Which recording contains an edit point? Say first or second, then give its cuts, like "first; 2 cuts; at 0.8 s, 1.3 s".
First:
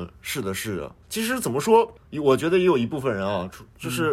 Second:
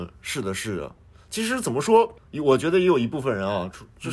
first; 1 cut; at 1.0 s